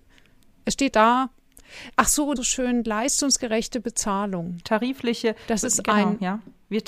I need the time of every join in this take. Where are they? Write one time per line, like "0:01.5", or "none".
0:00.9
0:02.4